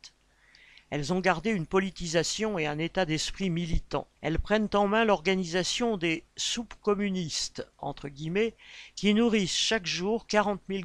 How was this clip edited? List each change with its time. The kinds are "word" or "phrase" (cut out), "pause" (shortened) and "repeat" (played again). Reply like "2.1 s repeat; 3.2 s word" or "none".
4.2 s pause